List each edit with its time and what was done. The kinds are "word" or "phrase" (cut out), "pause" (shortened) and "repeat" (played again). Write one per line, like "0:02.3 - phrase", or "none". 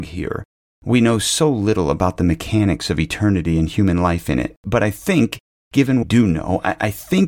0:06.0 - phrase

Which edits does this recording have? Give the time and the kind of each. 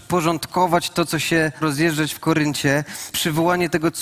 0:01.6 - word
0:03.1 - word

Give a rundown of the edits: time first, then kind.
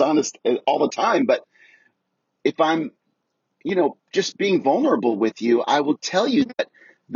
none

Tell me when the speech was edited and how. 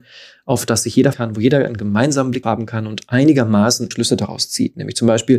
0:01.1 - word
0:02.4 - word
0:03.9 - word

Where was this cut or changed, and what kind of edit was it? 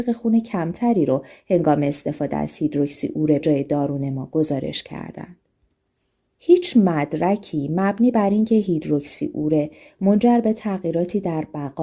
0:03.4 - word

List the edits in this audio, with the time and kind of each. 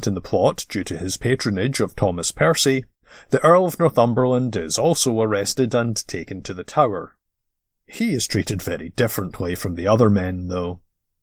none

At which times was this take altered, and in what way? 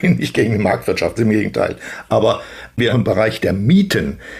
0:01.2 - word
0:02.9 - phrase

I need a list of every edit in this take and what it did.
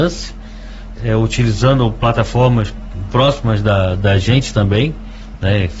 0:00.9 - word
0:03.1 - word

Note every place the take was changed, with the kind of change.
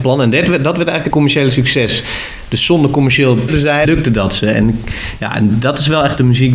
0:01.1 - word
0:03.5 - word
0:03.9 - word

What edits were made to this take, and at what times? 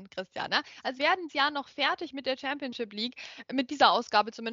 0:01.0 - word
0:01.3 - word

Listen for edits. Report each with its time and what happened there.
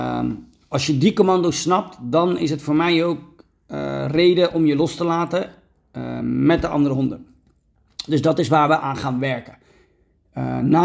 none

